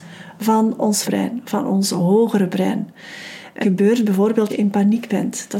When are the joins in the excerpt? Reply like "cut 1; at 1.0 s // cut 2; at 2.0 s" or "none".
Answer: cut 1; at 1.0 s // cut 2; at 3.6 s // cut 3; at 4.5 s